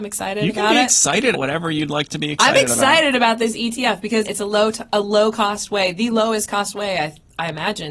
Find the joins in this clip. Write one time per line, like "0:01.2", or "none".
0:01.3
0:04.2